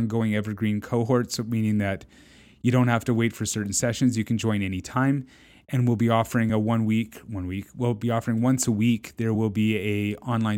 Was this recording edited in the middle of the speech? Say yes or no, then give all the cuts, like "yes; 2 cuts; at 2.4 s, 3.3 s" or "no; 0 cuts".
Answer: no; 0 cuts